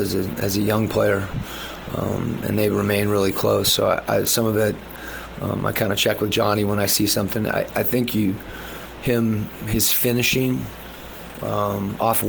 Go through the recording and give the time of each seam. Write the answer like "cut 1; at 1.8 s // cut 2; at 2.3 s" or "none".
none

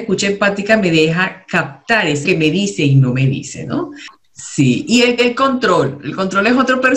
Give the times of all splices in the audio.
cut 1; at 2.2 s // cut 2; at 5.2 s

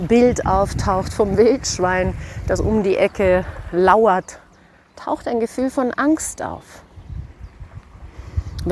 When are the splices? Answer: none

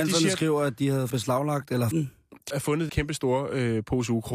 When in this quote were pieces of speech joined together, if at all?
cut 1; at 1.1 s // cut 2; at 1.9 s // cut 3; at 2.5 s // cut 4; at 2.9 s

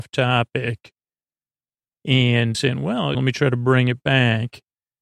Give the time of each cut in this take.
cut 1; at 2.5 s // cut 2; at 3.1 s

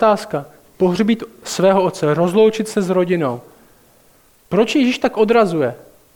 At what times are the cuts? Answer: none

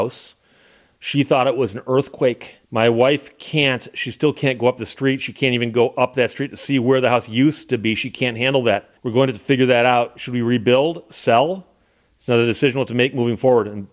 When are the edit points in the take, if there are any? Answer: cut 1; at 2.6 s // cut 2; at 9.0 s

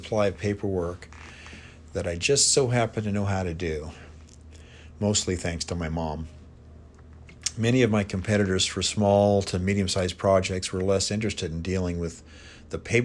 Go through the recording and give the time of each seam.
none

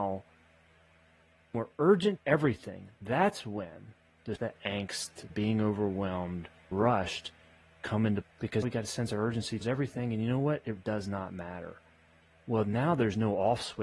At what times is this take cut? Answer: cut 1; at 1.5 s // cut 2; at 2.2 s // cut 3; at 4.4 s // cut 4; at 5.3 s // cut 5; at 6.7 s // cut 6; at 8.2 s // cut 7; at 8.6 s // cut 8; at 9.6 s // cut 9; at 10.8 s

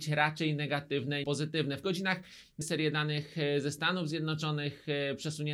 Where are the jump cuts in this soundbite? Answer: cut 1; at 1.2 s // cut 2; at 1.8 s // cut 3; at 2.6 s

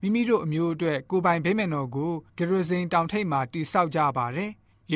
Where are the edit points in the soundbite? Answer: cut 1; at 2.3 s

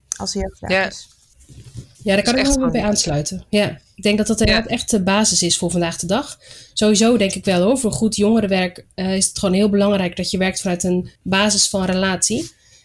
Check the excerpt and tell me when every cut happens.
cut 1; at 1.3 s // cut 2; at 1.9 s // cut 3; at 11.2 s

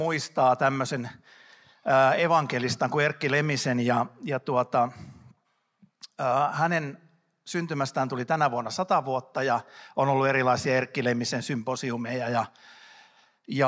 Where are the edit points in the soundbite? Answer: none

